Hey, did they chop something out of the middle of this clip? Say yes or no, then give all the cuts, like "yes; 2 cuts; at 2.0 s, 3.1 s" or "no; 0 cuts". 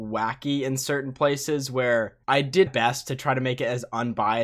yes; 2 cuts; at 2.2 s, 2.7 s